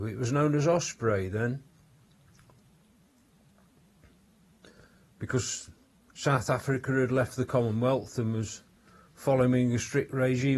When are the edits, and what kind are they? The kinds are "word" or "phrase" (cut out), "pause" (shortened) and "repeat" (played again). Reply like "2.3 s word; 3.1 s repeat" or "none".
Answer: none